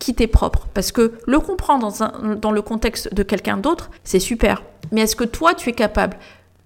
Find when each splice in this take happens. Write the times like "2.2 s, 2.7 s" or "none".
4.0 s